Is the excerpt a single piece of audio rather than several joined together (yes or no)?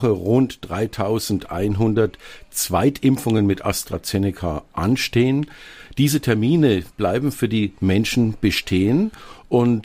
yes